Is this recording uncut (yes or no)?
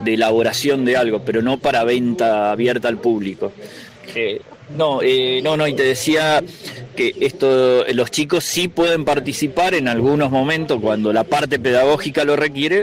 yes